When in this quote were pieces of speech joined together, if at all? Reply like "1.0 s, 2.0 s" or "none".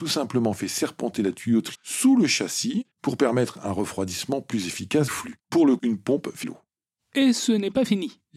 1.7 s, 2.9 s, 5.1 s, 5.4 s, 5.8 s, 6.4 s